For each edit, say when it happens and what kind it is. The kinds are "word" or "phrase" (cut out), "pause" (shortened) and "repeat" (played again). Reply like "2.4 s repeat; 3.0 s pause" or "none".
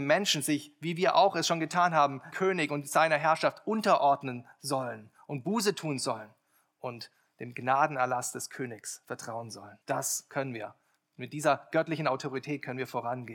2.3 s word; 9.8 s pause